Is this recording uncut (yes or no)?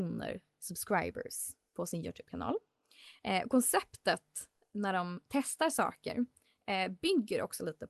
yes